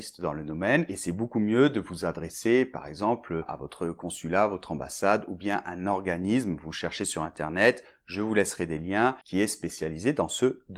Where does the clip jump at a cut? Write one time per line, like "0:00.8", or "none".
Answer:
0:09.2